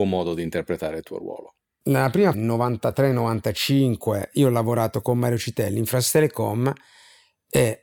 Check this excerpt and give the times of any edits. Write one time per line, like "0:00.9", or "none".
0:02.3